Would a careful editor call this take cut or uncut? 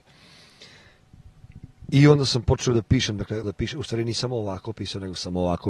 cut